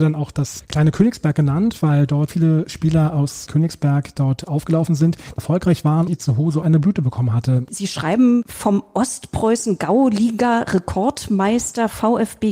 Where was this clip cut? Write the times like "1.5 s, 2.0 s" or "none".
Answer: 2.3 s, 5.4 s, 6.1 s, 6.6 s